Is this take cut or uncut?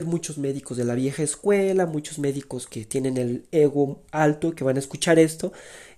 uncut